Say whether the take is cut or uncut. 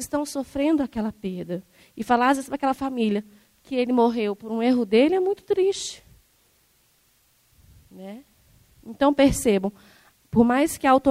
uncut